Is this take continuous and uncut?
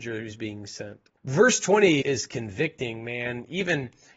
no; 2 cuts; at 1.2 s, 2.0 s

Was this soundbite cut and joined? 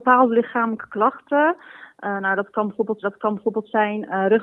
yes; 1 cut; at 3.0 s

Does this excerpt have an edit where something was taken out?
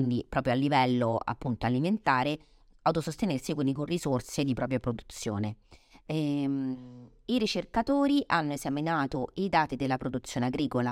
no; 0 cuts

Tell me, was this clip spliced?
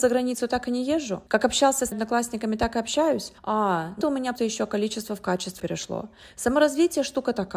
yes; 6 cuts; at 1.3 s, 1.9 s, 3.4 s, 4.0 s, 4.4 s, 5.6 s

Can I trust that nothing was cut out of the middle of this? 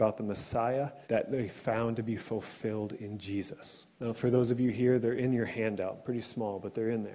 no; 2 cuts; at 1.0 s, 3.9 s

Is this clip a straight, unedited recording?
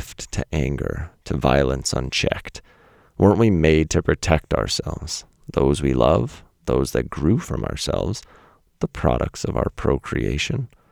yes; 0 cuts

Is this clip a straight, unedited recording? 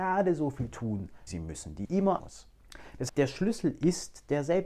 no; 4 cuts; at 1.3 s, 1.8 s, 2.2 s, 3.1 s

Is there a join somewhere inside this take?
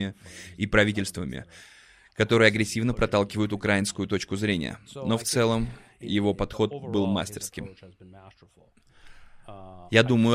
no; 0 cuts

